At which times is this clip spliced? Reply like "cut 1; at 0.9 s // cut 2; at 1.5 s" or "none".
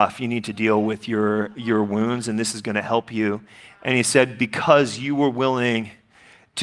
none